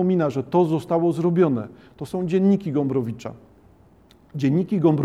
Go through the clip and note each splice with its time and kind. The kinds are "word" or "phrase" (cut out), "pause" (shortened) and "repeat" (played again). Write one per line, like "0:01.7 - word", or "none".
none